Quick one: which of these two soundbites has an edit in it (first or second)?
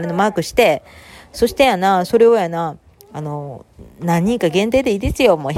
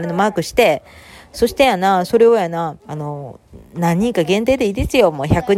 second